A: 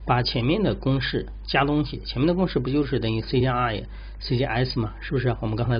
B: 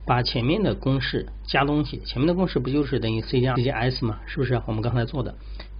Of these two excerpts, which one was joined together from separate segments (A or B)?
B